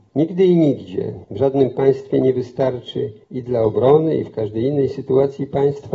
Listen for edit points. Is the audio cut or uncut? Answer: cut